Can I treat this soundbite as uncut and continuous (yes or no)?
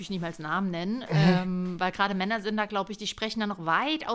yes